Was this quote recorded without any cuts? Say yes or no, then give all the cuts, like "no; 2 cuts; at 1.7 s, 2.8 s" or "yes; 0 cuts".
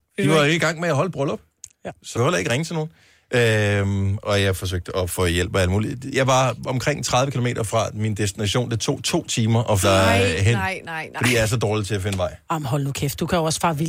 no; 2 cuts; at 2.2 s, 9.8 s